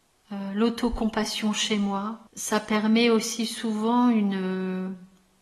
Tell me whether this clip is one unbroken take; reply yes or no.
no